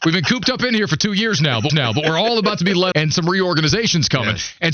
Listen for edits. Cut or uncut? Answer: cut